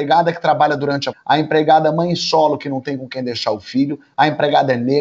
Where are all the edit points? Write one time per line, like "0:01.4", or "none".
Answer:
0:01.1